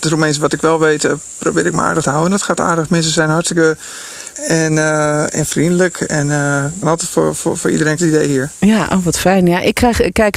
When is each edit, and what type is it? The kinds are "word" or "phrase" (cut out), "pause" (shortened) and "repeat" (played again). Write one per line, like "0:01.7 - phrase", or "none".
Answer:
0:02.0 - word
0:04.3 - word
0:06.8 - word
0:08.0 - phrase